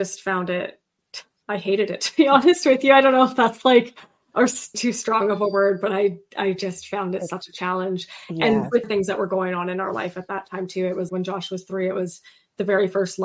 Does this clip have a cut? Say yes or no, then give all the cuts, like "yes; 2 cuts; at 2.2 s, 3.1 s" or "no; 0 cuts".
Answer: yes; 3 cuts; at 4.7 s, 8.8 s, 11.1 s